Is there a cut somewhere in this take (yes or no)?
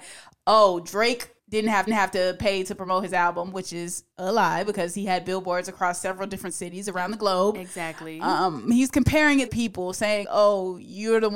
yes